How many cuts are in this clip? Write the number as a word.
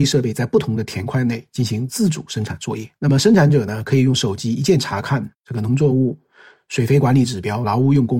two